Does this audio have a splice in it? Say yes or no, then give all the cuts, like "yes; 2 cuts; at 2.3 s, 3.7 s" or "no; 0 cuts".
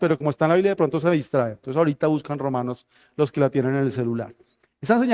no; 0 cuts